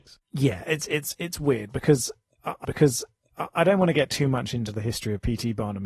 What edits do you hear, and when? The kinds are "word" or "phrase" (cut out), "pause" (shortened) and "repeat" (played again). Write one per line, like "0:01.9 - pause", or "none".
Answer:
0:02.6 - repeat